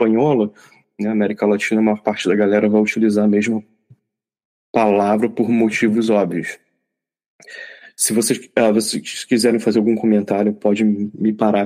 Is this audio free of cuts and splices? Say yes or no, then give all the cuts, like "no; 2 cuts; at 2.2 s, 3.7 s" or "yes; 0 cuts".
yes; 0 cuts